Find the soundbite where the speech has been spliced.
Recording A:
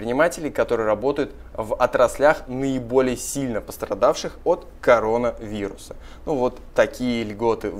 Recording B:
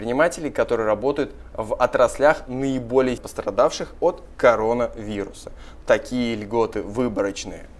B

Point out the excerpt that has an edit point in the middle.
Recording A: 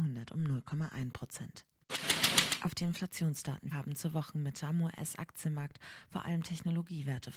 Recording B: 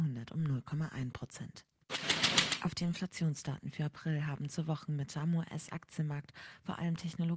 A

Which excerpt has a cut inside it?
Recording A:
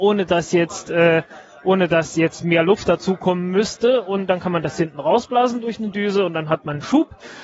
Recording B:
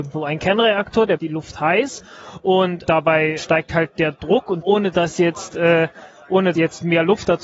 B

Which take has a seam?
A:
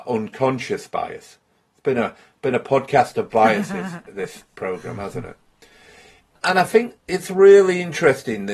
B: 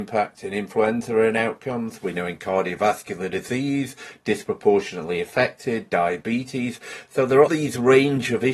B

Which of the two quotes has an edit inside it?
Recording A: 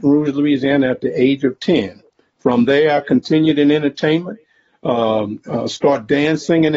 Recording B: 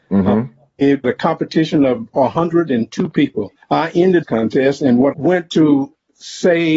B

